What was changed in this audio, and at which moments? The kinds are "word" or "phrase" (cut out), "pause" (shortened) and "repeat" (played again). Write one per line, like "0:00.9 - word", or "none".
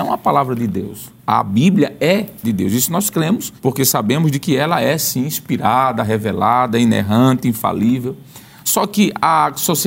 0:01.2 - pause
0:02.4 - phrase
0:03.6 - pause